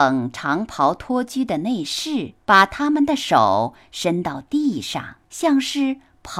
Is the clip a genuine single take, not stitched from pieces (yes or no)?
no